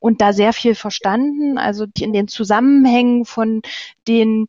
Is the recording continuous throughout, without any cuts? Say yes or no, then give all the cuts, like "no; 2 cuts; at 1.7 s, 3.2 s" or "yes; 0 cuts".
no; 1 cut; at 2.0 s